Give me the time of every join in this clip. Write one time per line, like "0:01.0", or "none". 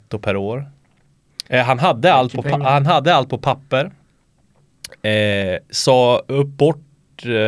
0:01.5